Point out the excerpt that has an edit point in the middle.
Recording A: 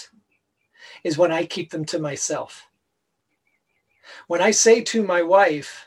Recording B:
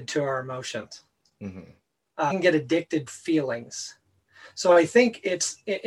B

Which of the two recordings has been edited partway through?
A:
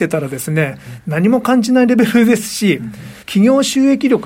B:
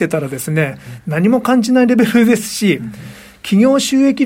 A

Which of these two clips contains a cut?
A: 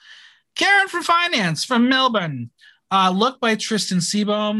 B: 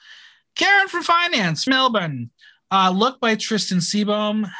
B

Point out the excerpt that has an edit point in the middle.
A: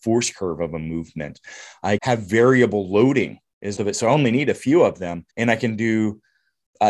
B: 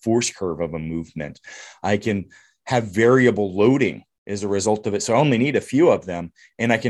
A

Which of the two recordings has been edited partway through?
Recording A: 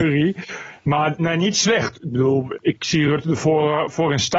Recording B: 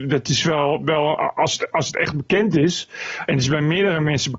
A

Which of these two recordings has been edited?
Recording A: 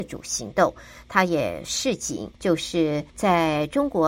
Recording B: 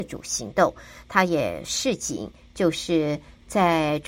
A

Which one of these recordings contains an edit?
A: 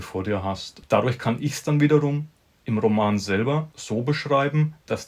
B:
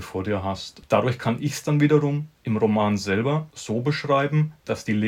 B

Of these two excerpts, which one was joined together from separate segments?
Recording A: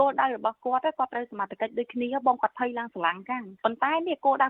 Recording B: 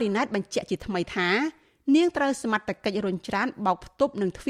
A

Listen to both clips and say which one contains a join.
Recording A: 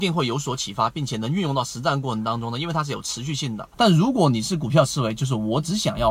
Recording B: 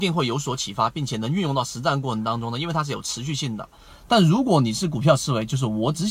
A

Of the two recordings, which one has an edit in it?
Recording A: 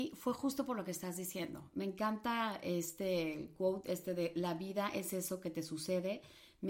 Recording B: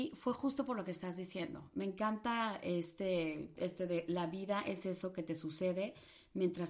B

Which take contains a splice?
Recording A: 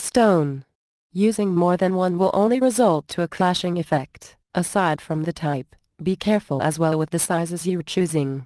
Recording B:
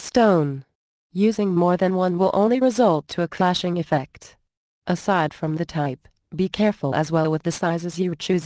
A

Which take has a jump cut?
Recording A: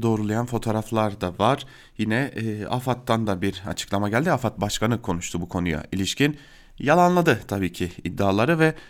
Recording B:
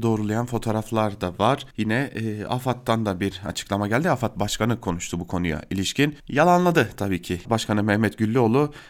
B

